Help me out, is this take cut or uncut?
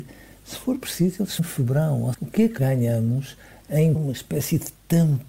cut